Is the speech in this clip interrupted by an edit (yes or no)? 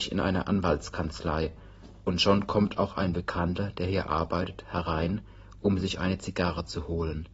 no